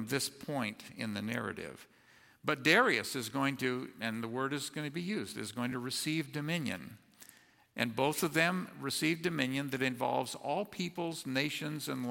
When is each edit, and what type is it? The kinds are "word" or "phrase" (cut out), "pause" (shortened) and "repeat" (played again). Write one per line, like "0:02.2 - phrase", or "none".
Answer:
none